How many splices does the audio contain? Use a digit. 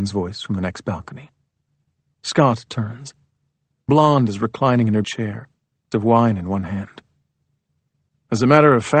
3